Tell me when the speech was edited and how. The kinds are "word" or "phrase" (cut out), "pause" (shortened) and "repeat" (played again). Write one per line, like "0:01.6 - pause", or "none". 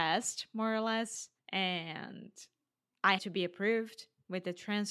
0:01.4 - pause
0:03.2 - word